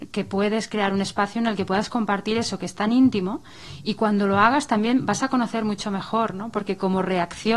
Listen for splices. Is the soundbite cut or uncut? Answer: uncut